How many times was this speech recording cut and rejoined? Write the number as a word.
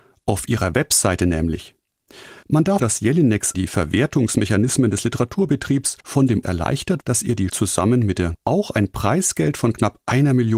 eight